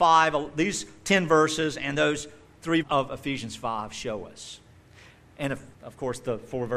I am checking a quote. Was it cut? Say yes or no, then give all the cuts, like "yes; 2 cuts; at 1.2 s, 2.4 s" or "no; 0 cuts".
yes; 3 cuts; at 1.9 s, 2.8 s, 5.7 s